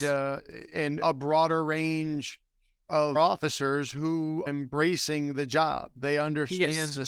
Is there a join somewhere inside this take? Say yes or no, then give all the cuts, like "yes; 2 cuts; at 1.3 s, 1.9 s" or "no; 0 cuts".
yes; 3 cuts; at 1.0 s, 3.1 s, 4.5 s